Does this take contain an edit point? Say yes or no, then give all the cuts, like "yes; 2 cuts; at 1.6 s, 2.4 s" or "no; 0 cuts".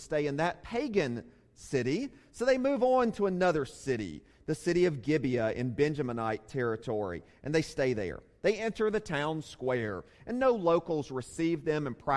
no; 0 cuts